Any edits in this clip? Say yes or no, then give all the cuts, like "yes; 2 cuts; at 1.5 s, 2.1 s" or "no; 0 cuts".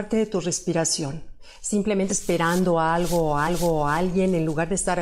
yes; 2 cuts; at 2.1 s, 3.5 s